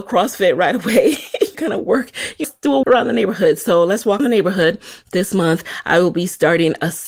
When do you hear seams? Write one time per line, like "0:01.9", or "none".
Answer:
0:01.5
0:02.4
0:02.8
0:04.2